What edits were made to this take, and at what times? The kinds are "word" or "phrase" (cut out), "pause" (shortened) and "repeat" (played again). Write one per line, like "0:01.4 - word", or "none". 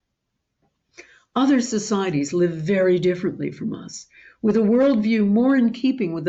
none